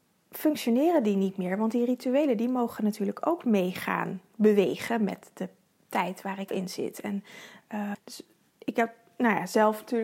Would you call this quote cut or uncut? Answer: cut